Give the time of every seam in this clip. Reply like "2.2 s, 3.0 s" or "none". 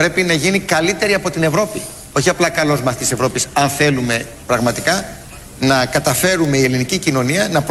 none